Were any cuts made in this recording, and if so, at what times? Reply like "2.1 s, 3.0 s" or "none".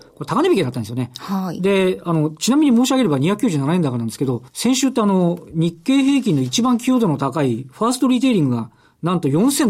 4.5 s